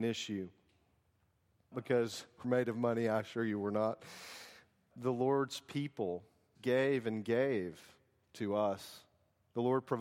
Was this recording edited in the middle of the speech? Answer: yes; 4 cuts; at 1.7 s, 2.4 s, 4.9 s, 6.6 s

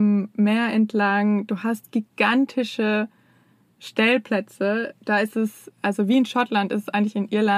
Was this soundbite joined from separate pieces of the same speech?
no; 0 cuts

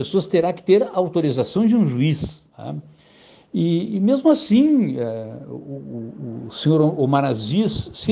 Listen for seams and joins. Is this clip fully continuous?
no; 1 cut; at 2.5 s

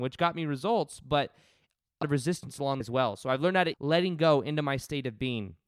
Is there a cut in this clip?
yes; 3 cuts; at 2.0 s, 2.8 s, 3.7 s

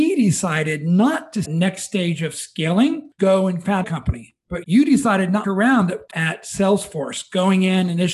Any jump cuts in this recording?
yes; 6 cuts; at 1.4 s, 3.2 s, 3.8 s, 4.6 s, 5.4 s, 6.1 s

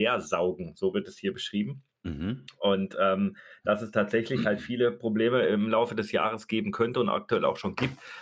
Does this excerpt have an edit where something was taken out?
no; 0 cuts

